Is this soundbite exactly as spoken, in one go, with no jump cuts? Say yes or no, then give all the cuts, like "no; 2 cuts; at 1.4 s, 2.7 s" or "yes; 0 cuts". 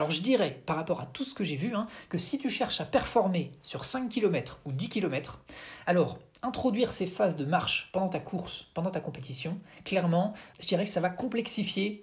no; 1 cut; at 10.5 s